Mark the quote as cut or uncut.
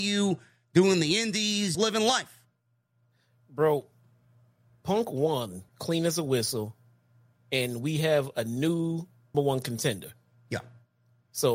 cut